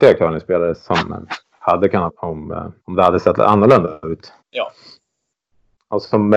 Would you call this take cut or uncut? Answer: cut